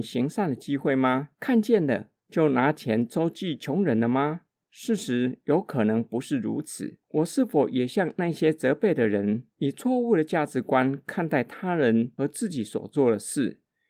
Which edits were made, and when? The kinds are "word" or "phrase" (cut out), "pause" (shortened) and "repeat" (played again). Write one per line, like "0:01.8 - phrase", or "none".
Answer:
0:01.3 - pause
0:02.2 - pause
0:04.5 - pause
0:07.0 - pause
0:09.5 - pause